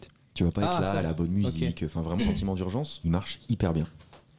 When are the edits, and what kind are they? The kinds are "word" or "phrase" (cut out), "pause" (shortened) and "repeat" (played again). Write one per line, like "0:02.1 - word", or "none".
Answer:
0:01.0 - phrase
0:02.2 - word
0:03.0 - phrase